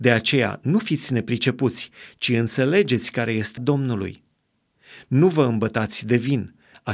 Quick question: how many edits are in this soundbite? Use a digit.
1